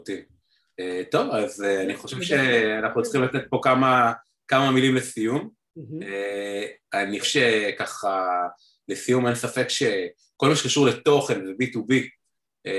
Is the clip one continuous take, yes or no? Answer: no